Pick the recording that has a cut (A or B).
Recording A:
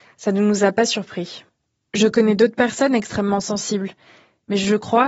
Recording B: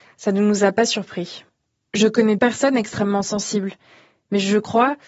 B